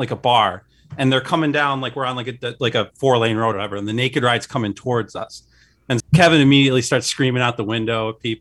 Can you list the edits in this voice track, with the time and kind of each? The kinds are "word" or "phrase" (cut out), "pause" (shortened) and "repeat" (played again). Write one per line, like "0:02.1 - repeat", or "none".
0:03.5 - word
0:06.0 - word